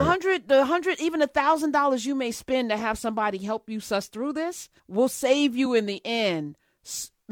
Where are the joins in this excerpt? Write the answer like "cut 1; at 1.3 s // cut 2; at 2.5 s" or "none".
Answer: cut 1; at 4.8 s